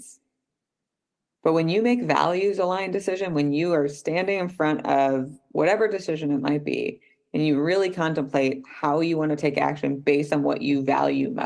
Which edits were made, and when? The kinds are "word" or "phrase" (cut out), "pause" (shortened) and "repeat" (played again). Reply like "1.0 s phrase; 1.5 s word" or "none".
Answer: none